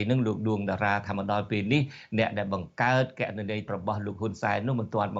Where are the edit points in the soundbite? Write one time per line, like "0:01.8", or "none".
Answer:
0:03.7

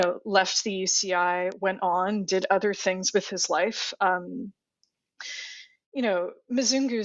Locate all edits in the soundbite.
none

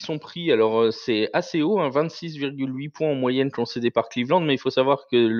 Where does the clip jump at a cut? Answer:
none

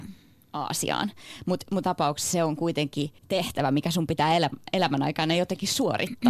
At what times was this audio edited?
0:01.8
0:03.2

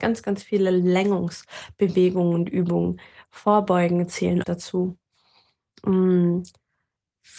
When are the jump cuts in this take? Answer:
0:04.4

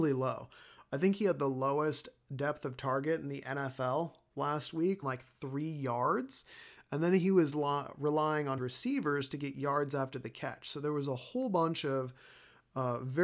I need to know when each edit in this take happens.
0:05.0
0:08.6

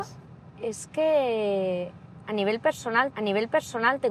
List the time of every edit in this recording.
0:03.1

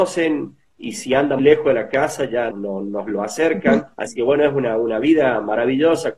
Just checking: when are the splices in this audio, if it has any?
0:01.4
0:02.5
0:03.9

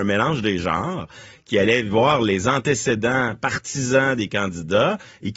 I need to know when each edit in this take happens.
none

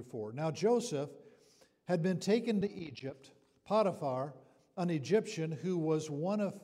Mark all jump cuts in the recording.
0:02.6

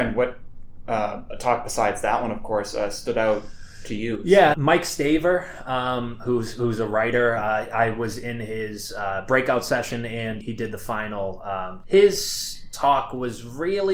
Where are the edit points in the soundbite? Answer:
0:04.5
0:10.4
0:11.8

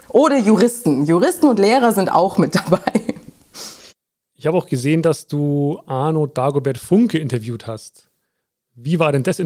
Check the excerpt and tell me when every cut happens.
0:03.9

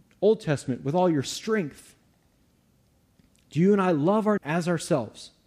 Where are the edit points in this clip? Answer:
0:04.4

